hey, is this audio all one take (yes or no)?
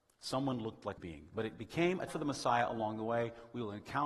no